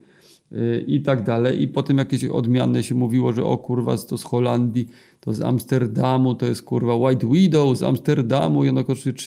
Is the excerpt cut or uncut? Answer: uncut